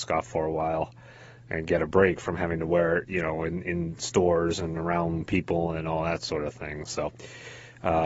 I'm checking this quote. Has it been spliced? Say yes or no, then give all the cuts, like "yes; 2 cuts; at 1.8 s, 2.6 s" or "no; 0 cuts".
no; 0 cuts